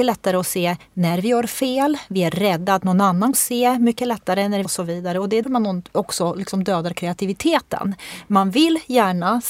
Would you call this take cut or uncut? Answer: cut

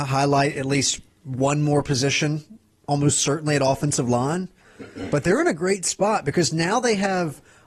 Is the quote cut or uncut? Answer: cut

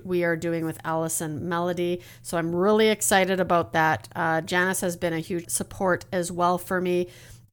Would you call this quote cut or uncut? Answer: cut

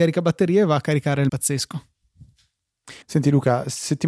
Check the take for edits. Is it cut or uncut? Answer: cut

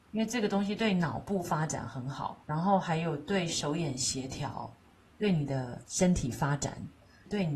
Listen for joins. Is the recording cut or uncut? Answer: cut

